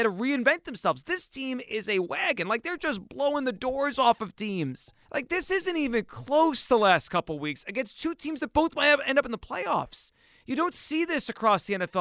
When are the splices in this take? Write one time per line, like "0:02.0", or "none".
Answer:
0:05.0